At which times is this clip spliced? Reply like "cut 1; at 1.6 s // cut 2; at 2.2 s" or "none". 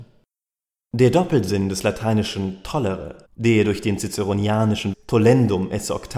cut 1; at 3.2 s // cut 2; at 4.9 s